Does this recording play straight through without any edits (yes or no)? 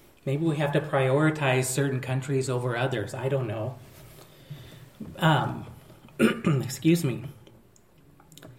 yes